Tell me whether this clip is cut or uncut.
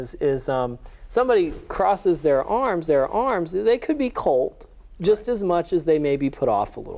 cut